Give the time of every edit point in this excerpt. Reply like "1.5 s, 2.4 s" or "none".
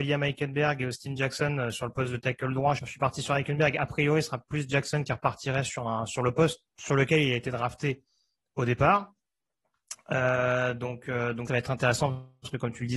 2.8 s, 11.5 s